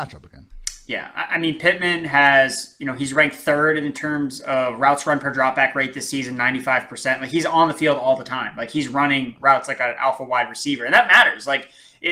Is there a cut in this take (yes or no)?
no